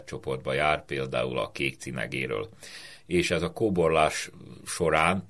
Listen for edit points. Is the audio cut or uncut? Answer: uncut